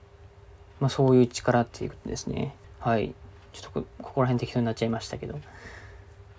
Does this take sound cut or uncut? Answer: cut